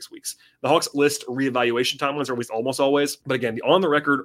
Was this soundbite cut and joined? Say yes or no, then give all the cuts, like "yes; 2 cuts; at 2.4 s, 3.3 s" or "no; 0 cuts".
yes; 2 cuts; at 0.9 s, 3.2 s